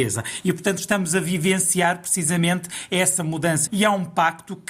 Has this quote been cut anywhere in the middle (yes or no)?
yes